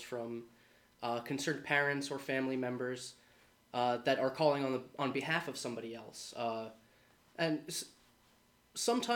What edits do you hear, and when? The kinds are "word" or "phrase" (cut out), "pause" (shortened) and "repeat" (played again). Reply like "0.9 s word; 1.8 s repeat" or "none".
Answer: none